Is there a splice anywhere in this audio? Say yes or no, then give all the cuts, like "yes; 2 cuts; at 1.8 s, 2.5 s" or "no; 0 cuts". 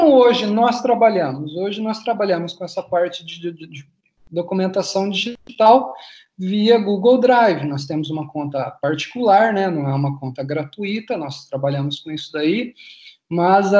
no; 0 cuts